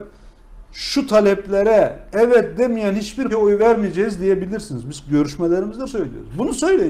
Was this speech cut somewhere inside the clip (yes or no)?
yes